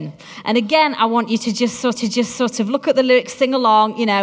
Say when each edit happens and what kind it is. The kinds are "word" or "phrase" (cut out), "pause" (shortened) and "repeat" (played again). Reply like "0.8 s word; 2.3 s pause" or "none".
2.0 s repeat

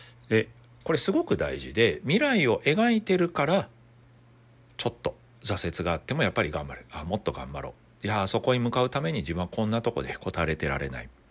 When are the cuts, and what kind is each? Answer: none

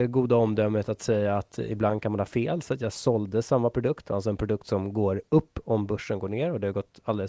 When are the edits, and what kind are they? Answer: none

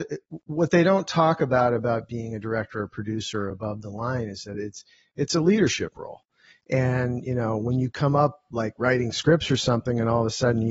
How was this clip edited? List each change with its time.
none

